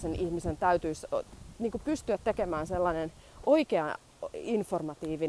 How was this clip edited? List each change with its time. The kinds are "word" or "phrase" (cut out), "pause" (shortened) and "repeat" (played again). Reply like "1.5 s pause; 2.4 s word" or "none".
none